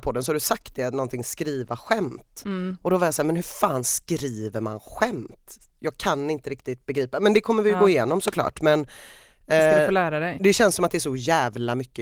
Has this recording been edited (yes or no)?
no